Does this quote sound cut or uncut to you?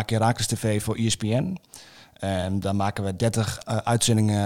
uncut